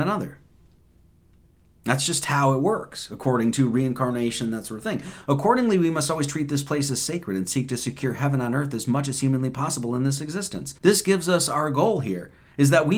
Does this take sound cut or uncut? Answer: cut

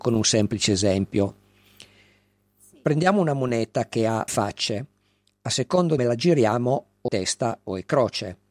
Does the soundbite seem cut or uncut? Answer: cut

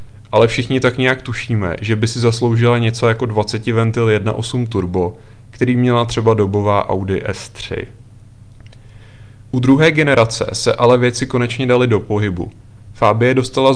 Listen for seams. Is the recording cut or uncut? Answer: uncut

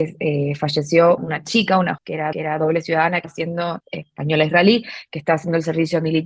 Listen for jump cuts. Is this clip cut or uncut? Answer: cut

